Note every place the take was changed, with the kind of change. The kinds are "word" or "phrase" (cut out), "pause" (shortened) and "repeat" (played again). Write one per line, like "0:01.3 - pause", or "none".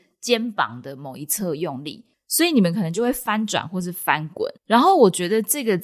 0:04.6 - pause